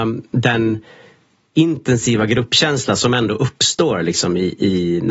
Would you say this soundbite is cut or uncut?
uncut